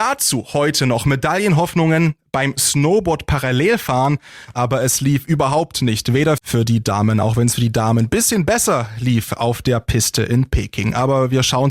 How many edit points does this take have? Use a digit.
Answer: 1